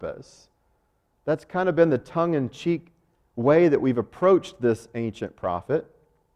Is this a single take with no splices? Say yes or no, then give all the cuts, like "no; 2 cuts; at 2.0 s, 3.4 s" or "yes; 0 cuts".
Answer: yes; 0 cuts